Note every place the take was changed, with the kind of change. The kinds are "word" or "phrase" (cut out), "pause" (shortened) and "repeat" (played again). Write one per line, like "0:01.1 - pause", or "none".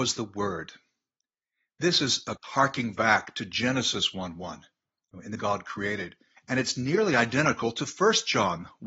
0:02.4 - word
0:05.4 - word
0:06.4 - pause